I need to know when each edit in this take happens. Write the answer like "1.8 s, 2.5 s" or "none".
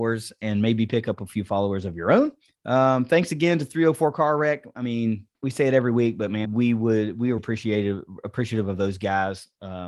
2.4 s, 5.3 s, 6.4 s, 7.4 s